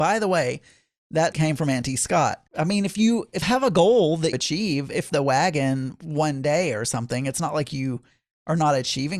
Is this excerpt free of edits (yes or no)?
no